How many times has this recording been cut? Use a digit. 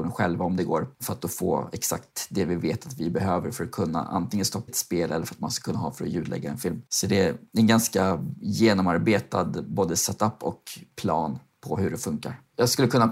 3